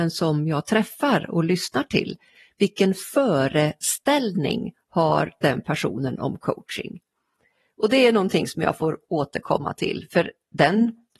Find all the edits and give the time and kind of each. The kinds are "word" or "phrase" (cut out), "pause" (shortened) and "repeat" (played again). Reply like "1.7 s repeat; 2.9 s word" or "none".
none